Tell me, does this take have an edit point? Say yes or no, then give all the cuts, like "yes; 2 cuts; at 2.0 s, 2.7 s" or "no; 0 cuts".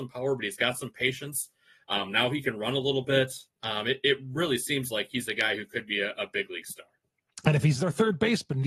no; 0 cuts